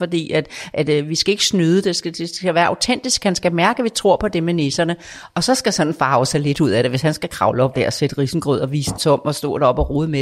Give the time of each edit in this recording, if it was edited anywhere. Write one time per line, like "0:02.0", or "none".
0:07.7
0:09.0